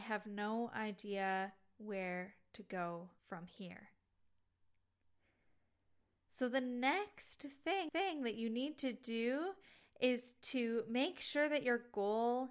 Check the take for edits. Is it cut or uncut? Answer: cut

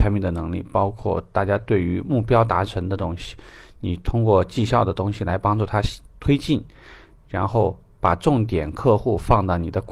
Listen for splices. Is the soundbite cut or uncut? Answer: uncut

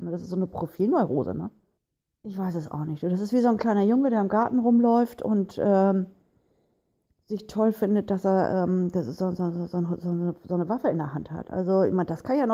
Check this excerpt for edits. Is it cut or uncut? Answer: cut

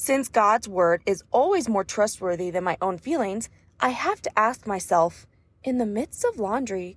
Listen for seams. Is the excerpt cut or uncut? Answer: uncut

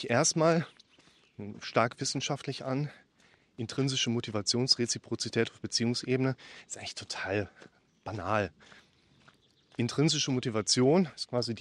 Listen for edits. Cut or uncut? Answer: uncut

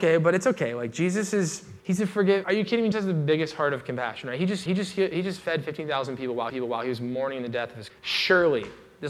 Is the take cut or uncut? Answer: cut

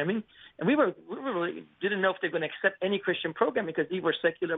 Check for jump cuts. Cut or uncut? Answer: cut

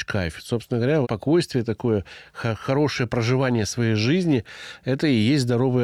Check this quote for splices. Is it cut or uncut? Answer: cut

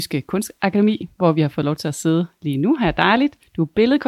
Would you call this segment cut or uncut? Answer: uncut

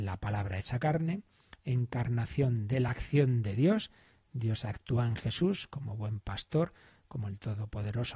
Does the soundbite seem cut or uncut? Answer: uncut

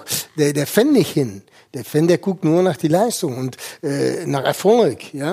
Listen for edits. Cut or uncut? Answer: uncut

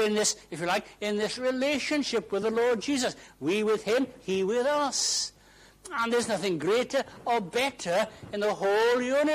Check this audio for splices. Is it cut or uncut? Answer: uncut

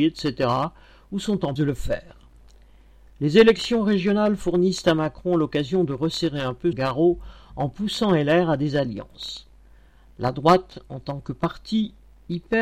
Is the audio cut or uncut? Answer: cut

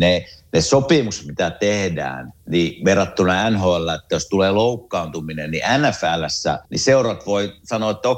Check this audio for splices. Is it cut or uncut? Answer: cut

